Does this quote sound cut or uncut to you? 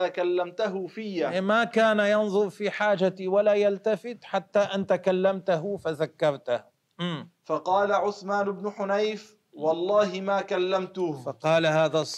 uncut